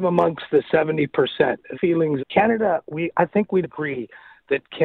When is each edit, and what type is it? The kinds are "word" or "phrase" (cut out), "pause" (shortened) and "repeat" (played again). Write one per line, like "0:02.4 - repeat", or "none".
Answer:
0:01.7 - word
0:02.2 - word
0:03.6 - word